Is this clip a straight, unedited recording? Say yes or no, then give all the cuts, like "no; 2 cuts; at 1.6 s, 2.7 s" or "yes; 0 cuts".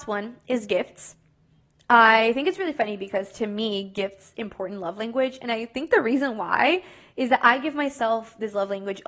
no; 1 cut; at 4.3 s